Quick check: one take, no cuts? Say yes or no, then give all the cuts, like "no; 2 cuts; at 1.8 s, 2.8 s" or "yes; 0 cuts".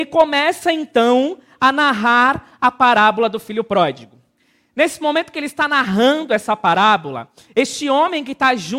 yes; 0 cuts